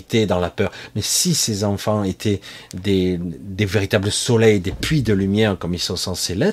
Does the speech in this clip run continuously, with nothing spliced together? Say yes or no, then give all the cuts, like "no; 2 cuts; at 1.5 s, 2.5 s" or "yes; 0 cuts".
yes; 0 cuts